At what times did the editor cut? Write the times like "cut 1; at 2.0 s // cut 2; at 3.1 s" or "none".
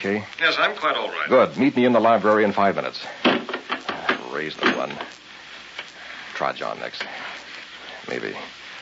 cut 1; at 4.6 s